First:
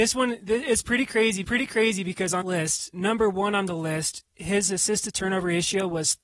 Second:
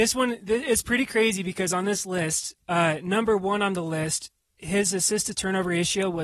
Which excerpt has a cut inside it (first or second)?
first